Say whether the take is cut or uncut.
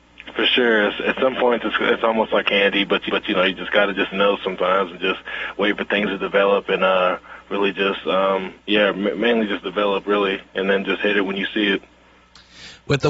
cut